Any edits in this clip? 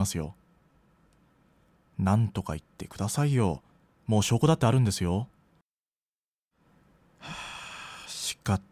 no; 0 cuts

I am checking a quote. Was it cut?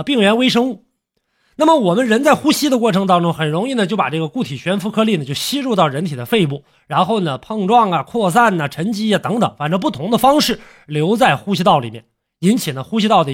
no; 0 cuts

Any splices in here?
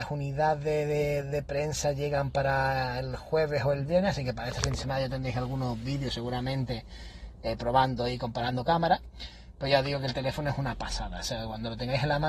no; 0 cuts

